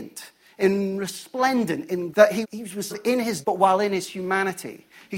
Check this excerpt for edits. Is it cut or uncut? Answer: cut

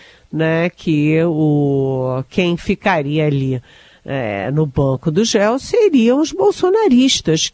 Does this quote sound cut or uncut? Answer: uncut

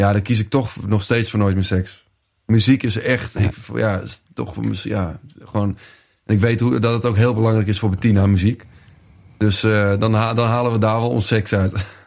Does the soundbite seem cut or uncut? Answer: uncut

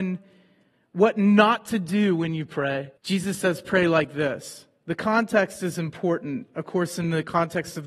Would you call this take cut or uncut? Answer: cut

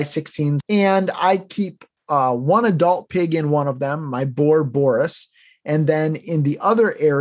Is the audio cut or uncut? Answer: uncut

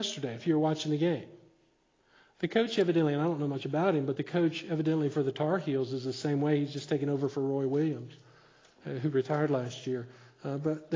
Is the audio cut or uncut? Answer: uncut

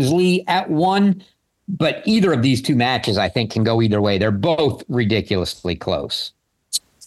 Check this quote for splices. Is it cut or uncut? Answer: uncut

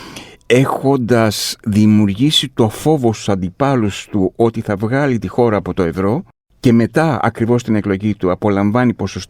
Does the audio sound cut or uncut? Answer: uncut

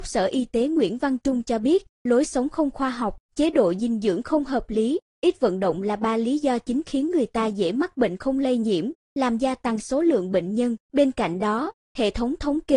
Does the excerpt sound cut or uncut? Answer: cut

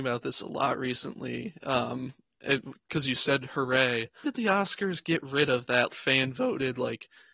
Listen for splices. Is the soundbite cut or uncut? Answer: cut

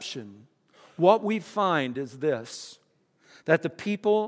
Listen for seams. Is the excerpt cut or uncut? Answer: uncut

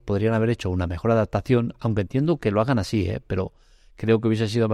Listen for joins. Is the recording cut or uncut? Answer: uncut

